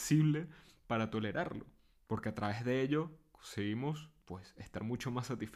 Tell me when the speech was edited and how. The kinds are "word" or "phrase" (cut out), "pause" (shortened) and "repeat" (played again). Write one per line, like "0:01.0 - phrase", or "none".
0:01.9 - pause
0:04.2 - pause

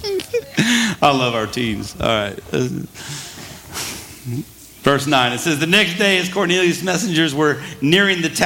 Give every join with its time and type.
none

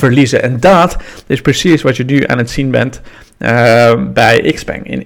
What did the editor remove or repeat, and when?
none

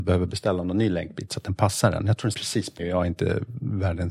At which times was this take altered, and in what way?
0:02.3 - word
0:02.8 - word

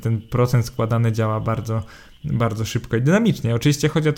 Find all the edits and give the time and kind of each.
none

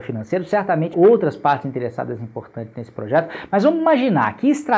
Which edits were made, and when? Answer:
0:00.9 - phrase

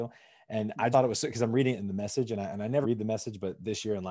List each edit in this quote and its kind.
0:00.9 - word
0:02.8 - word

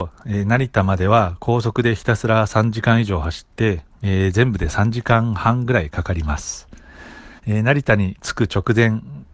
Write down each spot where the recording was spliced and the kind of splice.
0:07.4 - pause

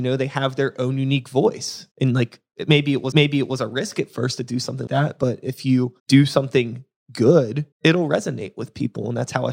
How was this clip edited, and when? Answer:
0:01.9 - pause
0:03.1 - repeat
0:04.9 - word
0:06.0 - pause
0:07.7 - pause

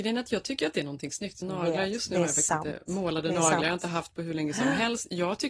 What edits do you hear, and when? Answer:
0:01.4 - word

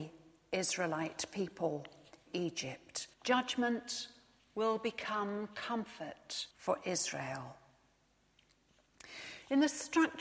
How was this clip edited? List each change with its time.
0:02.3 - word
0:03.1 - pause
0:06.5 - pause

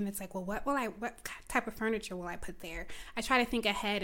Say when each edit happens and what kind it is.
none

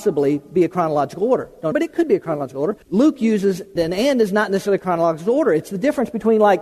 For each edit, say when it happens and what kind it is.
0:01.7 - phrase
0:02.8 - pause
0:03.8 - word

